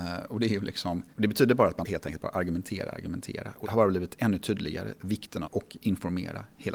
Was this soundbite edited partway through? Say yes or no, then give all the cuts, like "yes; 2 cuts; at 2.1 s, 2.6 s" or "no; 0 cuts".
yes; 4 cuts; at 1.1 s, 1.8 s, 3.6 s, 5.4 s